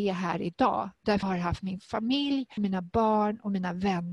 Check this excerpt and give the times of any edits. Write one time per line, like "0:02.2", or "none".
0:01.2
0:02.6